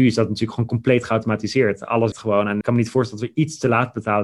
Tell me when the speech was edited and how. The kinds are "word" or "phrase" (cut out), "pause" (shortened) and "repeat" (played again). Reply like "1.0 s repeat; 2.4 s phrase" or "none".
2.1 s word; 2.6 s word